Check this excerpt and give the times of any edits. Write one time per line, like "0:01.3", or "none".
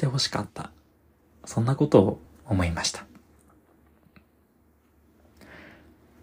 none